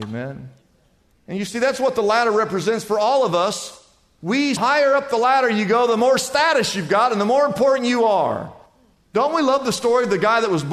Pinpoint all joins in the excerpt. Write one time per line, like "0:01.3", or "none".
0:04.6

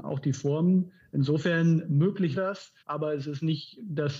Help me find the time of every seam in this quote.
0:02.3
0:02.8

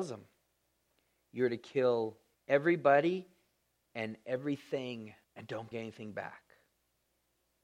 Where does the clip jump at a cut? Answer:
0:02.3
0:05.2
0:05.7

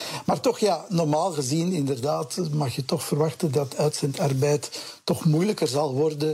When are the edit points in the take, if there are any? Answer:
none

